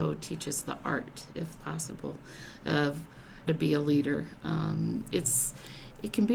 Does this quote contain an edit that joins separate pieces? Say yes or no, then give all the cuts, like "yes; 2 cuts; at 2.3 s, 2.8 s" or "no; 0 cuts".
yes; 3 cuts; at 1.5 s, 3.5 s, 5.1 s